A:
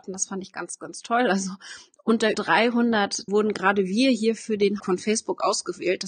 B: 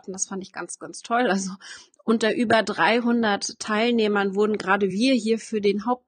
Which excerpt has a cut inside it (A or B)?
A